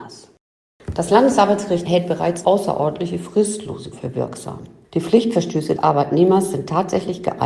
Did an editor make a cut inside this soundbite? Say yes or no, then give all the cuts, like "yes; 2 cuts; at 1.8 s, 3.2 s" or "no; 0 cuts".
yes; 4 cuts; at 1.9 s, 2.4 s, 3.9 s, 5.8 s